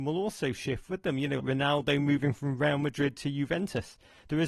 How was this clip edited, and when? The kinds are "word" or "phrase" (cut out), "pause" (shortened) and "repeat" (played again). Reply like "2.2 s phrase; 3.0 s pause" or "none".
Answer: 1.4 s word